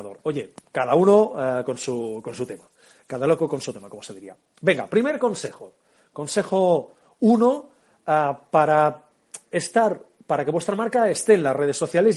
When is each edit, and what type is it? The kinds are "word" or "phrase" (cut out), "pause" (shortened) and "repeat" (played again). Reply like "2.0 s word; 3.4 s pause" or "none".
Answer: none